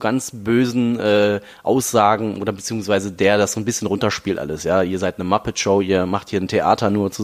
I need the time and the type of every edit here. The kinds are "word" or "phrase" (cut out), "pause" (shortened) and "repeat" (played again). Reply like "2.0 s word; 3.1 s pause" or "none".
none

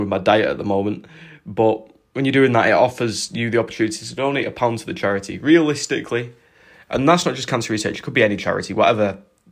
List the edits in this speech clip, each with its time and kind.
none

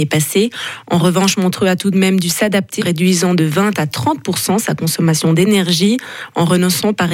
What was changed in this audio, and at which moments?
2.8 s word

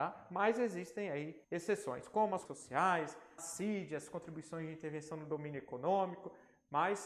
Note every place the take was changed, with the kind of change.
1.4 s pause; 2.5 s word; 3.4 s word

